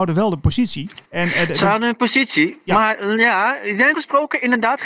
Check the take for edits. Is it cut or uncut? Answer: cut